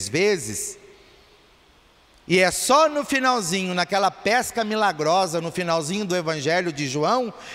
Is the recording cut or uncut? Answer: uncut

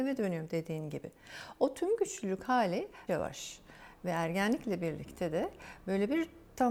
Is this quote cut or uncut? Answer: cut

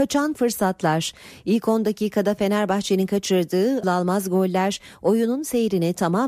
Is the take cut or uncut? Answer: cut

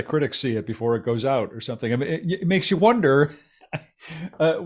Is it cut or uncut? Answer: uncut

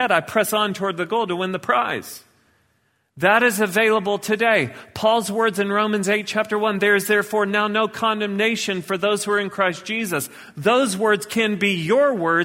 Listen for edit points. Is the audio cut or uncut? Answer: uncut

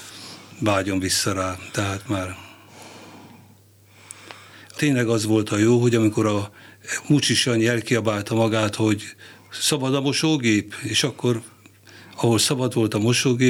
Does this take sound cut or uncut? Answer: cut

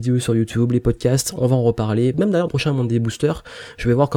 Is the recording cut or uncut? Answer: cut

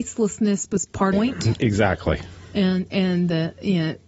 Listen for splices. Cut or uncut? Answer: cut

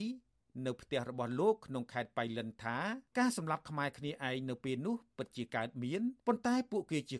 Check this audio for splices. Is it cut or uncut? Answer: cut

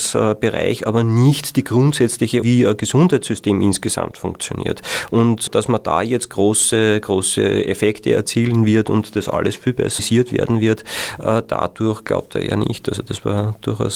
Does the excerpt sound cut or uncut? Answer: cut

